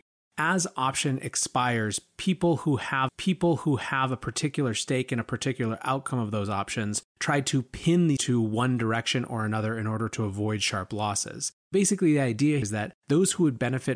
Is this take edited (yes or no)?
yes